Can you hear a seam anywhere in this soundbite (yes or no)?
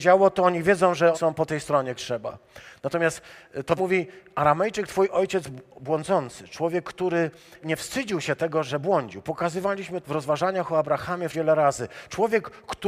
yes